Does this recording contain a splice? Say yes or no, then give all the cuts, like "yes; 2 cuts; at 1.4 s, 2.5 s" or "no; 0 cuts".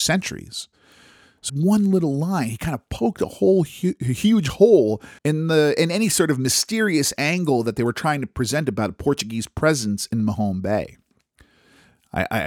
yes; 2 cuts; at 1.5 s, 5.2 s